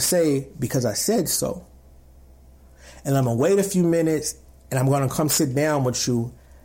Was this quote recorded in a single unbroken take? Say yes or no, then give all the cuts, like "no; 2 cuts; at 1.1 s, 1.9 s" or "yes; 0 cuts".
yes; 0 cuts